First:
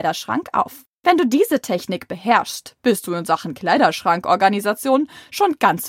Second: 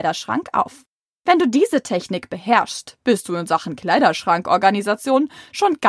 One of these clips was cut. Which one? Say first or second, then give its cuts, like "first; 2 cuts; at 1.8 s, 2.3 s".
first; 1 cut; at 0.9 s